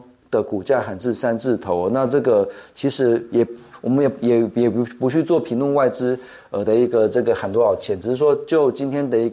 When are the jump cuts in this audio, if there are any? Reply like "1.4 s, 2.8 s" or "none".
none